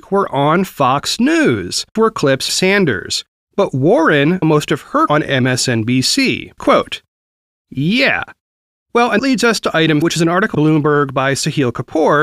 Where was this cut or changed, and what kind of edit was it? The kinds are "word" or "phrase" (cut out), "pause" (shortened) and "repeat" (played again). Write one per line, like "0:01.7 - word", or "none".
0:02.0 - word
0:02.5 - word
0:04.4 - word
0:05.1 - word
0:06.6 - word
0:09.2 - word
0:10.0 - word
0:10.5 - word